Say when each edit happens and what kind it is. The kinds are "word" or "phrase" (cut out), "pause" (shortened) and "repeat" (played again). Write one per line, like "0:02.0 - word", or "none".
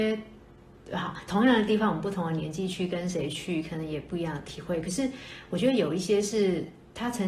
0:01.3 - phrase